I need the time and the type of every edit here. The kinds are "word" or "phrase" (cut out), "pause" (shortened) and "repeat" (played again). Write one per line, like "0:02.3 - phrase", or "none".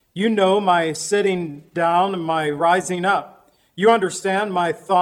none